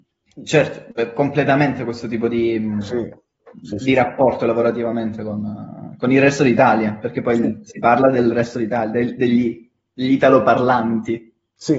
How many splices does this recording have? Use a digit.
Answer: 0